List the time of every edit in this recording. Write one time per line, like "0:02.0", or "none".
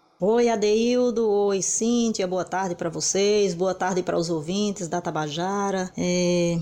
none